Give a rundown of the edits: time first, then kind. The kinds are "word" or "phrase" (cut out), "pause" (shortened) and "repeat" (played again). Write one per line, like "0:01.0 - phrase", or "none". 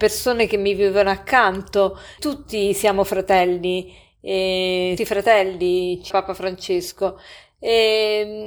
0:02.2 - word
0:05.0 - phrase
0:06.1 - word